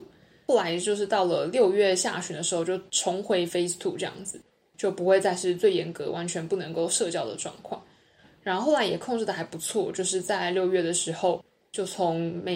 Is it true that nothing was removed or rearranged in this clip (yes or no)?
yes